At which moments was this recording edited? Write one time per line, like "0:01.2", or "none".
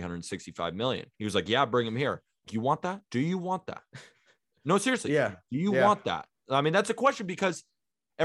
0:01.1
0:02.5
0:03.0